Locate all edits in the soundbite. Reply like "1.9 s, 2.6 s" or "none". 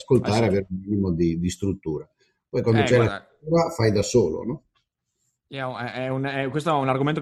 none

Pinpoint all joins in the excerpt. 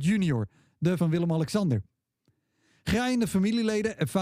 1.0 s

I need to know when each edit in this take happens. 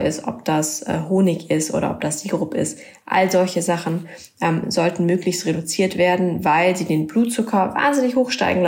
none

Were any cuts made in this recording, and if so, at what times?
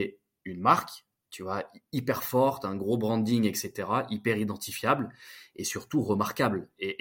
none

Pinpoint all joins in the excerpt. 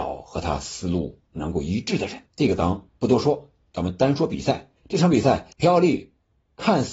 1.3 s, 2.3 s, 4.8 s, 5.5 s

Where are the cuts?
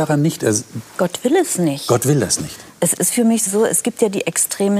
3.5 s

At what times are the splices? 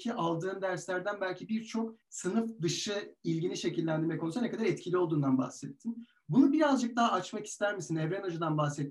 2.0 s

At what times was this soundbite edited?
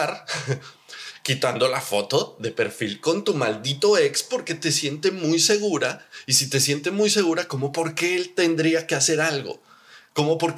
none

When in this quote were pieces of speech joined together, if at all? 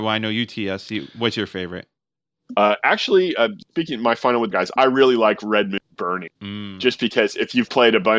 4.5 s, 6.3 s

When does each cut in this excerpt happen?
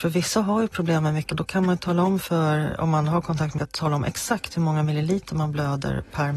1.3 s, 3.6 s

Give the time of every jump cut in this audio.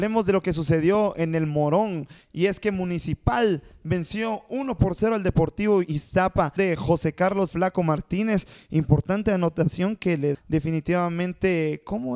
6.6 s, 7.5 s, 10.3 s

